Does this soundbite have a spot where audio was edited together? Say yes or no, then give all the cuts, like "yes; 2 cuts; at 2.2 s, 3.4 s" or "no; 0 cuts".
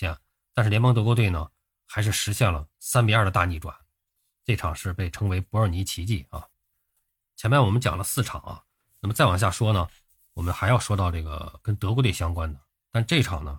no; 0 cuts